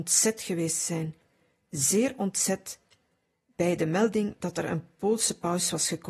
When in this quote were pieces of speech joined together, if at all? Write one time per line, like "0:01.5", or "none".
none